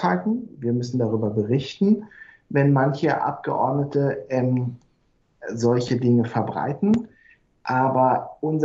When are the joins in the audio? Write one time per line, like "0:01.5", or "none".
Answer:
none